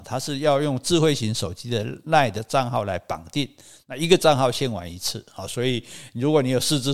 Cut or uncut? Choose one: uncut